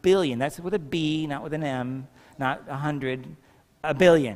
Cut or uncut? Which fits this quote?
uncut